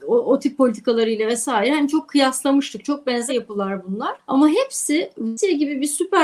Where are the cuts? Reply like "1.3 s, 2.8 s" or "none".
3.3 s